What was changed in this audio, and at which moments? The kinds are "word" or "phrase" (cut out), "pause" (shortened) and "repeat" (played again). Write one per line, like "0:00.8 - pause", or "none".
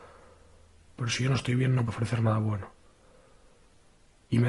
0:01.9 - word